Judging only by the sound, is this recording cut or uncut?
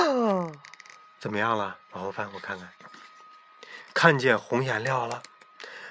cut